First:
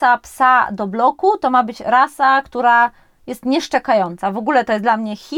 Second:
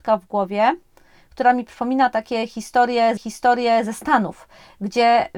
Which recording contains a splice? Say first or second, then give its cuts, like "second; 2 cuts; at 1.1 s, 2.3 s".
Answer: second; 1 cut; at 3.2 s